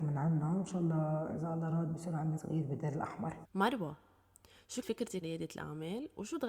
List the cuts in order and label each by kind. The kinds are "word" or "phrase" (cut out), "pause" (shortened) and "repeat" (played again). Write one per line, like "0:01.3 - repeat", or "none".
0:02.4 - word
0:03.4 - pause
0:04.8 - word
0:05.2 - word